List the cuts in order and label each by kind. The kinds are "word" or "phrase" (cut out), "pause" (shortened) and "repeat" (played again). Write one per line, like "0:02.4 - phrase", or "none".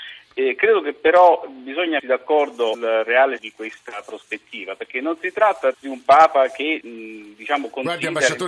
0:02.0 - word
0:02.7 - word
0:03.4 - word
0:05.7 - word
0:06.8 - word